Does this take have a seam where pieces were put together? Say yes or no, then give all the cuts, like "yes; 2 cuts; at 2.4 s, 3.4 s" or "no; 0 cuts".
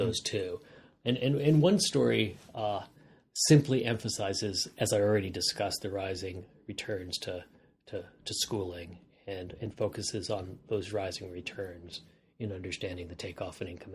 no; 0 cuts